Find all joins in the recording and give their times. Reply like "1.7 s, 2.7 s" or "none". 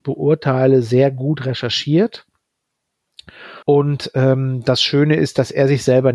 3.6 s